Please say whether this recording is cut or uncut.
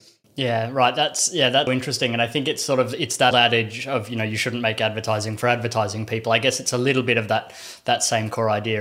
cut